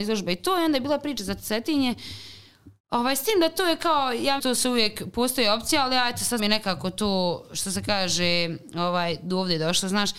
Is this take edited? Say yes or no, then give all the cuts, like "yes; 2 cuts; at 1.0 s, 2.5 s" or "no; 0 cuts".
yes; 2 cuts; at 4.4 s, 6.4 s